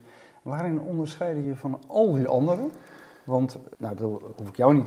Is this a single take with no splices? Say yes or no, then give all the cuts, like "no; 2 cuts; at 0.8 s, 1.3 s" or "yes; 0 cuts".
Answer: no; 2 cuts; at 1.4 s, 3.7 s